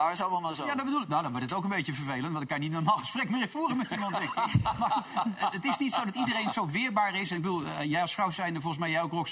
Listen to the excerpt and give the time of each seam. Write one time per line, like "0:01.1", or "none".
none